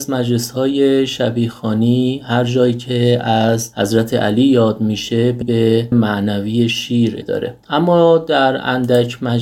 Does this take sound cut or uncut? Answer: cut